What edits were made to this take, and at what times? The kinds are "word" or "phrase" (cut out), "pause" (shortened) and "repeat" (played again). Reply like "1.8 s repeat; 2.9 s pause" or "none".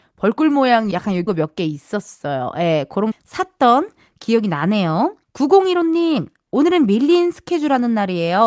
0.9 s word; 1.3 s word; 3.1 s phrase; 5.2 s pause